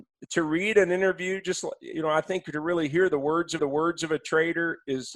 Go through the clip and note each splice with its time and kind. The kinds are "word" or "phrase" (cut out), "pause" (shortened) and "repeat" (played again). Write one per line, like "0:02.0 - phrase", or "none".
0:03.6 - repeat